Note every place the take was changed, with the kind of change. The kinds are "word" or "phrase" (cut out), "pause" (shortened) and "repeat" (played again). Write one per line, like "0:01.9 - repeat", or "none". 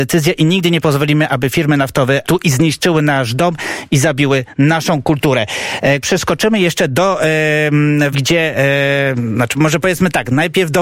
0:02.2 - phrase
0:06.0 - word
0:08.1 - word
0:09.5 - word